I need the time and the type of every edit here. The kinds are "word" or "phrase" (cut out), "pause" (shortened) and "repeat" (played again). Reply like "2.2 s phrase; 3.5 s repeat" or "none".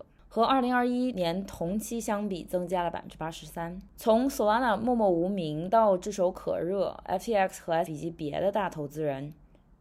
7.9 s word